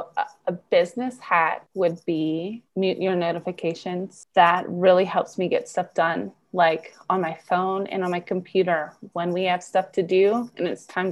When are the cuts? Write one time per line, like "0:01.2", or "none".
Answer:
0:02.7